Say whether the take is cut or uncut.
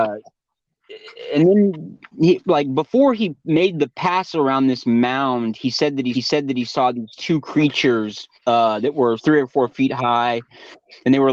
cut